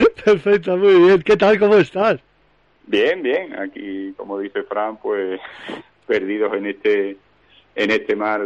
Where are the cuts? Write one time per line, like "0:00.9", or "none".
none